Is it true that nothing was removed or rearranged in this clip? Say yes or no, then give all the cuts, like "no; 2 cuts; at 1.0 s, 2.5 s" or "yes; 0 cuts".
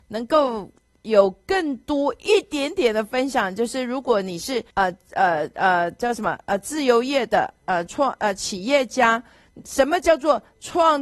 no; 1 cut; at 4.7 s